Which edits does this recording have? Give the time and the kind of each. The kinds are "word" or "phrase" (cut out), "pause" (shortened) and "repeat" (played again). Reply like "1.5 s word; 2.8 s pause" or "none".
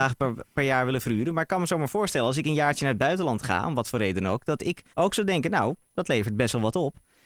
4.9 s pause